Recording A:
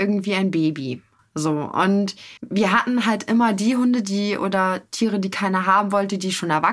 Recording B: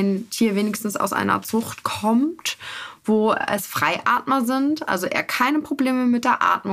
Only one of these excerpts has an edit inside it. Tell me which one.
A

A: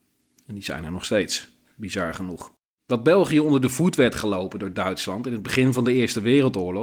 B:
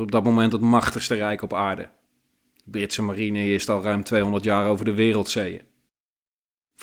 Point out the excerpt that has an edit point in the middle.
A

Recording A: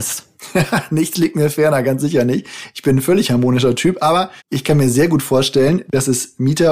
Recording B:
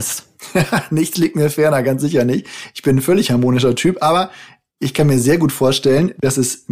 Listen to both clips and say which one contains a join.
A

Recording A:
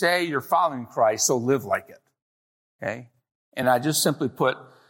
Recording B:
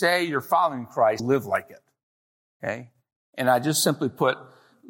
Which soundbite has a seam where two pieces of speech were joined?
B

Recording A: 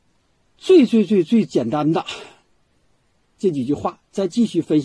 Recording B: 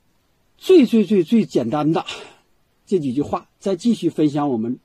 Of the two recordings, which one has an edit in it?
B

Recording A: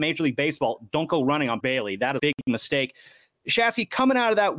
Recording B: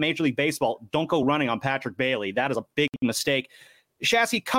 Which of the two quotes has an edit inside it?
A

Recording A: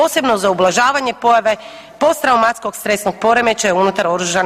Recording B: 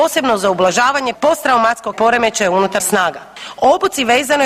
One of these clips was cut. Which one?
B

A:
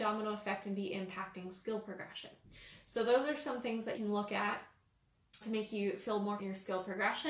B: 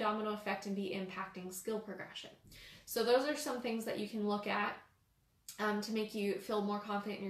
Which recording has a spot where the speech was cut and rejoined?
A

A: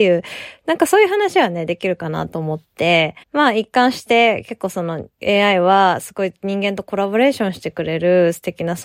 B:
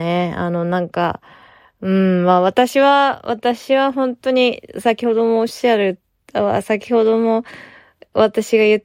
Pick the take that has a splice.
A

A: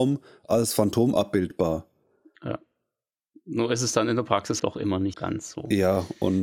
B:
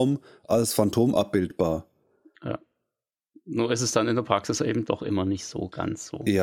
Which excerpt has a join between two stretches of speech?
A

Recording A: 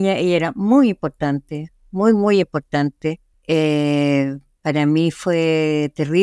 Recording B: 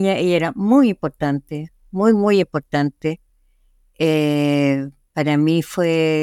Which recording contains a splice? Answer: A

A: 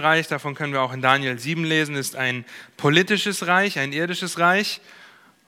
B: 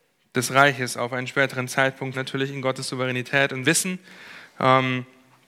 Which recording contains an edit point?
B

